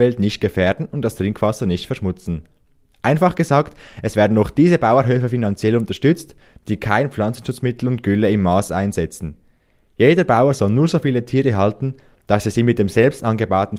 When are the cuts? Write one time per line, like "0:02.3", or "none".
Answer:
none

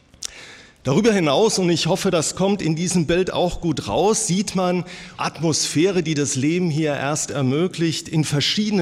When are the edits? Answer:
0:05.2

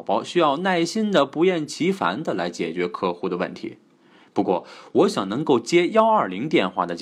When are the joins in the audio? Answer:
none

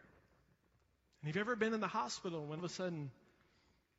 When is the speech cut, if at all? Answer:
0:02.6

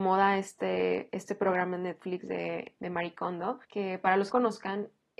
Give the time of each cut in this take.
0:02.7
0:03.6
0:04.3

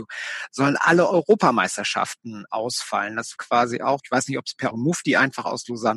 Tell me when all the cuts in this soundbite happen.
0:02.5
0:03.4
0:04.0
0:04.7

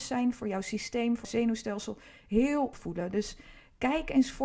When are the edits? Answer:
0:01.2
0:02.7

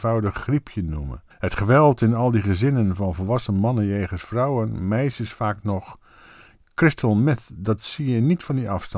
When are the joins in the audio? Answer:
0:01.3

